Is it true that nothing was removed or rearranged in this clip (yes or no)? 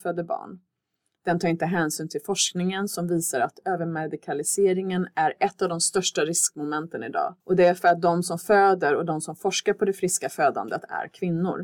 no